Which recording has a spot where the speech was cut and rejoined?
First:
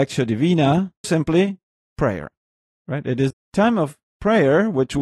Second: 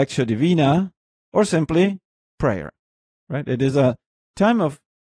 first; 2 cuts; at 1.0 s, 3.3 s

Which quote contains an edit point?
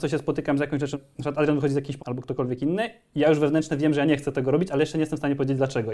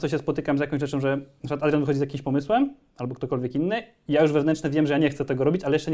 first; 2 cuts; at 0.9 s, 2.0 s

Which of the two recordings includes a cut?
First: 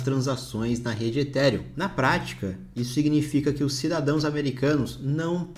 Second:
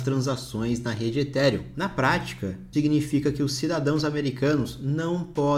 second; 1 cut; at 2.7 s

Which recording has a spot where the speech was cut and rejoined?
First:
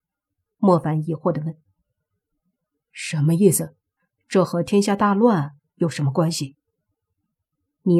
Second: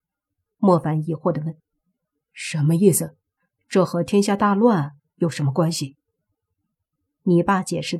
second; 1 cut; at 1.6 s

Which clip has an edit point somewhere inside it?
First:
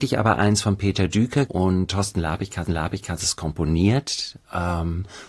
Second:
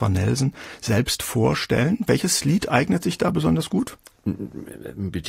first; 3 cuts; at 1.5 s, 1.9 s, 2.6 s

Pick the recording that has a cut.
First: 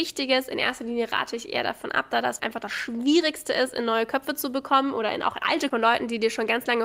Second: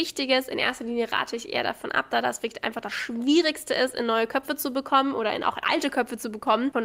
first; 2 cuts; at 2.4 s, 5.7 s

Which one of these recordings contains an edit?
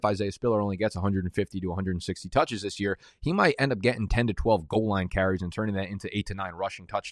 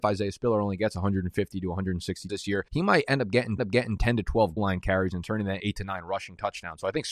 second; 5 cuts; at 2.3 s, 2.7 s, 3.6 s, 4.6 s, 5.6 s

